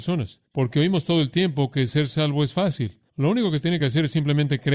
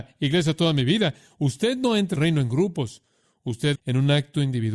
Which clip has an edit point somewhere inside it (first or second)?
second